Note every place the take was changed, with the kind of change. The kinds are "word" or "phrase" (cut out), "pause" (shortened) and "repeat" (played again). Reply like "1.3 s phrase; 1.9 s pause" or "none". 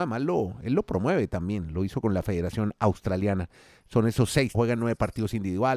4.5 s word